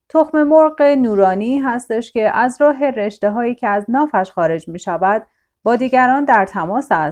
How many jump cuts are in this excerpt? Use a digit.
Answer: 0